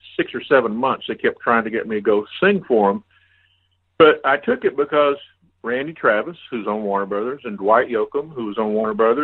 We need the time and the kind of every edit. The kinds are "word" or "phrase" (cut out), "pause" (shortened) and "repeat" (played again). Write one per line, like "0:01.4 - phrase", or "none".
none